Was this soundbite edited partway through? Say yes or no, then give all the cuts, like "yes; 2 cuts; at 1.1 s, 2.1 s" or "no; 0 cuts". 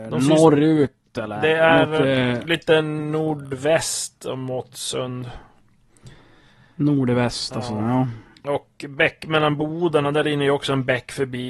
no; 0 cuts